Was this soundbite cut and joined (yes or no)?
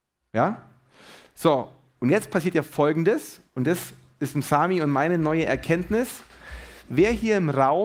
no